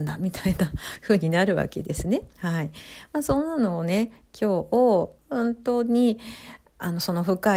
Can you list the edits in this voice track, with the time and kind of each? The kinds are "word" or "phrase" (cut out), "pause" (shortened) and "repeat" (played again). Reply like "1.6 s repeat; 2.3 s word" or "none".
2.3 s pause; 5.2 s pause